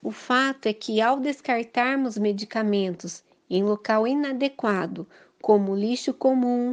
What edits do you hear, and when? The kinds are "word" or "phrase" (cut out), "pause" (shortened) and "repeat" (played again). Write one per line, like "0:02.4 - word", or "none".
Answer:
none